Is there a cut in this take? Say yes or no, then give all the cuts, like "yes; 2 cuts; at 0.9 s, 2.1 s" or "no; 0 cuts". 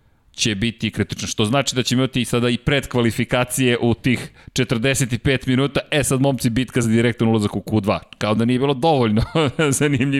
no; 0 cuts